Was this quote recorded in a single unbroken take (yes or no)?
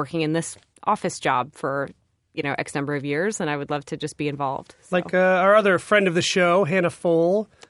yes